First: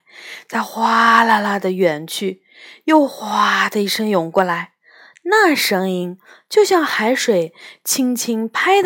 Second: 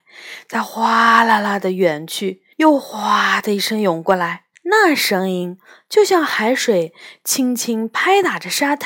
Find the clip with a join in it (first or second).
second